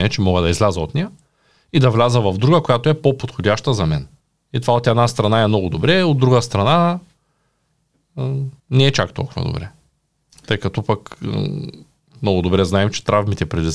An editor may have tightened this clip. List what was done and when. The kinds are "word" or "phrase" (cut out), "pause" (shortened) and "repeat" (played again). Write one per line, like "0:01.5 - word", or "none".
0:04.2 - pause
0:08.6 - pause